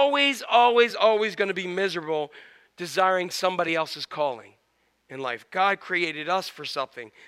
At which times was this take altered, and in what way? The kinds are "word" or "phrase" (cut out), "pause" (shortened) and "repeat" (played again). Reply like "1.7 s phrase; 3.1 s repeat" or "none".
none